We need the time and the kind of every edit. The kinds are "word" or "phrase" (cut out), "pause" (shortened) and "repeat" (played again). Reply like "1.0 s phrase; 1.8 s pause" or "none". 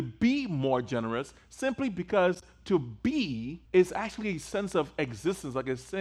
3.6 s pause